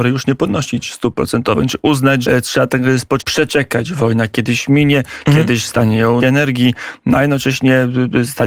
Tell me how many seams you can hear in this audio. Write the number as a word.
three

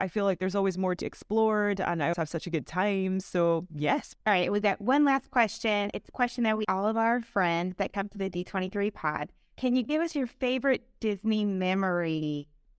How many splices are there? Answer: four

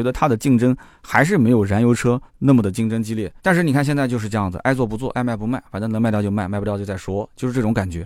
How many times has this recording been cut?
two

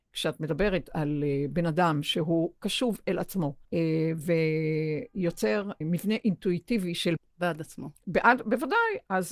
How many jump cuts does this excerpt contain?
three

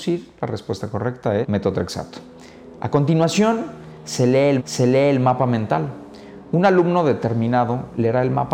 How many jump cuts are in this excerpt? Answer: two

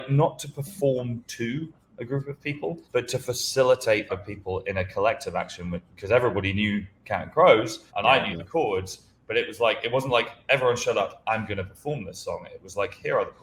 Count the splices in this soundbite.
three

